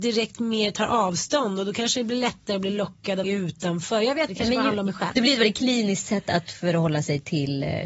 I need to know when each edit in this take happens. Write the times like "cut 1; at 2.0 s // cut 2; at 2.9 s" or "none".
cut 1; at 3.2 s // cut 2; at 4.3 s